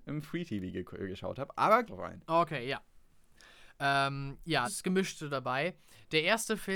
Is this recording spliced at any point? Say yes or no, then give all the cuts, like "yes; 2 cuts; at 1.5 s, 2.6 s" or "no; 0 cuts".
yes; 2 cuts; at 1.9 s, 4.6 s